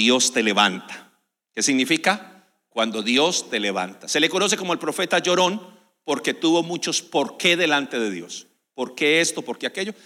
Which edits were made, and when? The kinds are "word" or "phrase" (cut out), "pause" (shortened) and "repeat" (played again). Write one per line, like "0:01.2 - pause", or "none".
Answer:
none